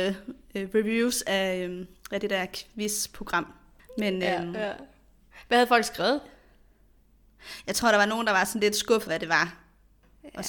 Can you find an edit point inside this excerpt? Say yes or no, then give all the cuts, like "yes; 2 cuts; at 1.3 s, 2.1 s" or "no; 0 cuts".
yes; 1 cut; at 9.1 s